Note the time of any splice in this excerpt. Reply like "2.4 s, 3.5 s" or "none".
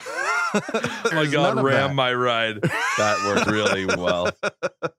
1.1 s, 3.5 s, 4.0 s